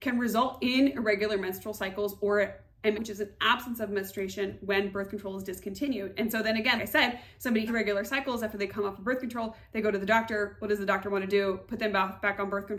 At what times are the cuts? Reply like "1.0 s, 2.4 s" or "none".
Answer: 2.9 s, 6.8 s, 7.7 s